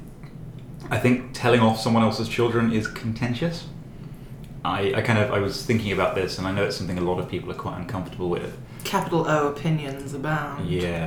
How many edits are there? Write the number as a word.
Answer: zero